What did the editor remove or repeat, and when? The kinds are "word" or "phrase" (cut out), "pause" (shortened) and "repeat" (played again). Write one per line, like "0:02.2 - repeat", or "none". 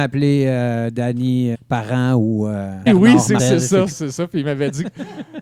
0:01.5 - word
0:02.9 - word
0:03.4 - word
0:03.9 - word